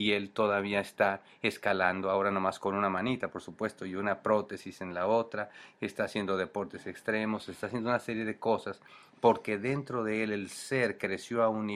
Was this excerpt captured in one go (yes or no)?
yes